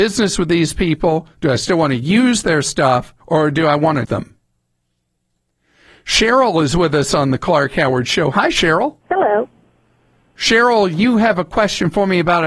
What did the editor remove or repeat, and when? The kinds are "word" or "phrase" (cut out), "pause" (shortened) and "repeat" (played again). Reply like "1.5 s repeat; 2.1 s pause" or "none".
3.2 s pause; 4.0 s word; 9.0 s pause